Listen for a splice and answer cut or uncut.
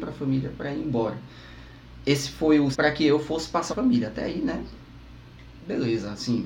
cut